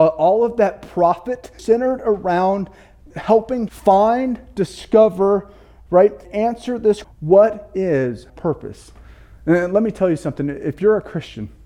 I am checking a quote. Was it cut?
yes; 6 cuts; at 1.6 s, 3.1 s, 3.7 s, 6.2 s, 7.0 s, 8.3 s

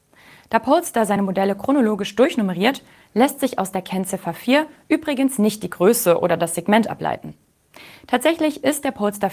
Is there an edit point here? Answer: no; 0 cuts

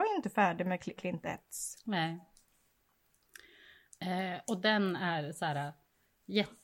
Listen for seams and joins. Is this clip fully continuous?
no; 1 cut; at 1.0 s

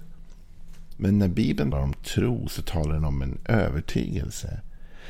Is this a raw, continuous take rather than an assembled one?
no; 1 cut; at 1.7 s

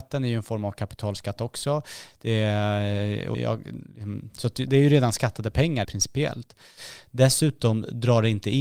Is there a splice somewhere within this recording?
yes; 3 cuts; at 3.3 s, 4.7 s, 5.8 s

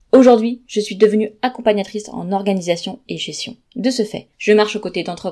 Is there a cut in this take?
yes; 2 cuts; at 3.7 s, 4.3 s

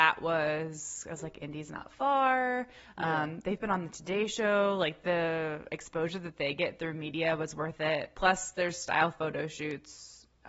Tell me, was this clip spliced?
no; 0 cuts

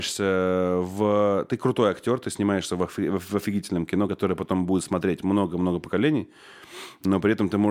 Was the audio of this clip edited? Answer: no; 0 cuts

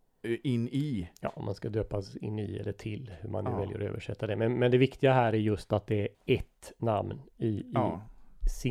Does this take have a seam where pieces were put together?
yes; 1 cut; at 6.1 s

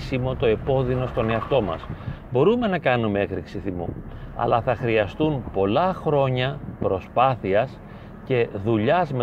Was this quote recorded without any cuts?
yes; 0 cuts

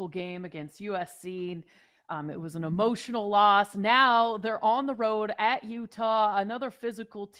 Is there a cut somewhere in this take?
no; 0 cuts

